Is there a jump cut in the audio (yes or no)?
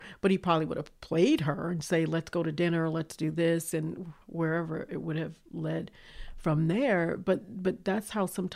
yes